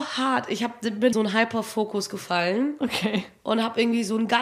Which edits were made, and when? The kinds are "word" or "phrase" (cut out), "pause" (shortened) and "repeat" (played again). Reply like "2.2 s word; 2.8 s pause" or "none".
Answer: 1.1 s phrase